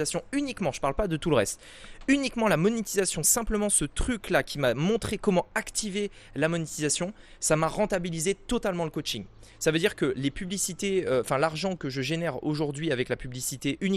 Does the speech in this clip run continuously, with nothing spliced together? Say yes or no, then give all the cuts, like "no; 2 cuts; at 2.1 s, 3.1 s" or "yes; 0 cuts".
yes; 0 cuts